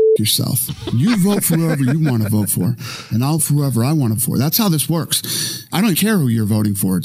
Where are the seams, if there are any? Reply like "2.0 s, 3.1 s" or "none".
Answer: 3.4 s, 4.2 s, 5.9 s